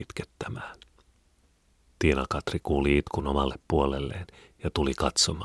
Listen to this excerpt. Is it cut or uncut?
uncut